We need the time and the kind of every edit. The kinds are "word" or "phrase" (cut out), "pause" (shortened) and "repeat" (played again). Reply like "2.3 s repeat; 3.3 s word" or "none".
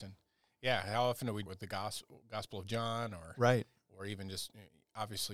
1.5 s phrase